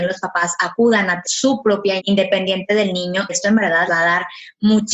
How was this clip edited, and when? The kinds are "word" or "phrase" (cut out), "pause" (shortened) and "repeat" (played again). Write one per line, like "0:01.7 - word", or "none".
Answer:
0:01.2 - word
0:02.0 - word
0:03.3 - word
0:03.9 - word